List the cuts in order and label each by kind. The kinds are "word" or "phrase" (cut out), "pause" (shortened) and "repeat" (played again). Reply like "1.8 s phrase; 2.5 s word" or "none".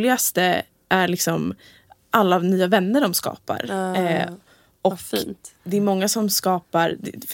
none